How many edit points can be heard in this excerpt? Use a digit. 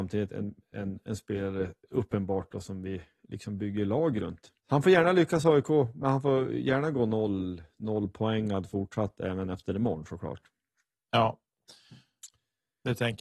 1